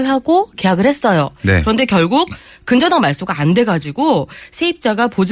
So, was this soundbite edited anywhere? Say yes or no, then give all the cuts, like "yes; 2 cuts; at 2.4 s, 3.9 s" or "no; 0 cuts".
no; 0 cuts